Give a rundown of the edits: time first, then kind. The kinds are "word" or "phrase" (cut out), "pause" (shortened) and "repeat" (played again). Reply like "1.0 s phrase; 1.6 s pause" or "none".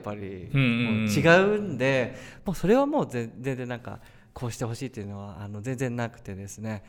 none